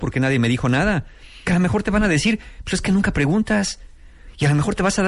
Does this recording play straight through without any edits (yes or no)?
no